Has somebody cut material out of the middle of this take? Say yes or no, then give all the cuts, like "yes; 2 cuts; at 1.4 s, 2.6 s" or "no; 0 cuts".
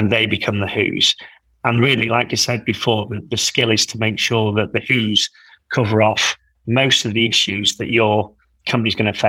no; 0 cuts